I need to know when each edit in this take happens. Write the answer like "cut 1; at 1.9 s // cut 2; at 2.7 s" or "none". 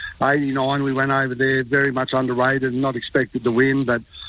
none

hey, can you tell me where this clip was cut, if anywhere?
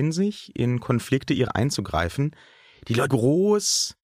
cut 1; at 1.5 s // cut 2; at 3.1 s

